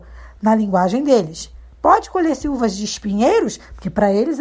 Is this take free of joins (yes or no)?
yes